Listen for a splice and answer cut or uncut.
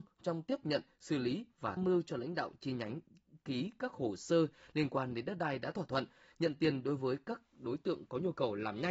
cut